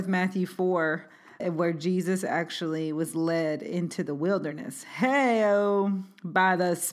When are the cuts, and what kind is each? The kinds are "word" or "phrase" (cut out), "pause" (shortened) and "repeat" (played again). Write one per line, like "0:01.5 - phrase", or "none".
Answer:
0:01.4 - word